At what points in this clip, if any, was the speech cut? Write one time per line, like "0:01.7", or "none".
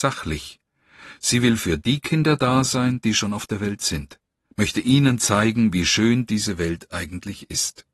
none